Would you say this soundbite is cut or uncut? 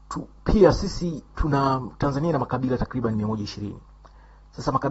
cut